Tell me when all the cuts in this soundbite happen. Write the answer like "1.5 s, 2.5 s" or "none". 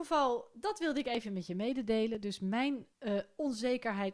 2.9 s